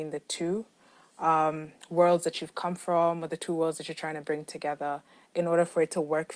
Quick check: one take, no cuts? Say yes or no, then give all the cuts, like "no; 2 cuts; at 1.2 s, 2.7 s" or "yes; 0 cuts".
yes; 0 cuts